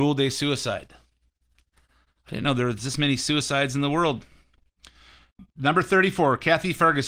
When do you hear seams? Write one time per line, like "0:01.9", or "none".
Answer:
none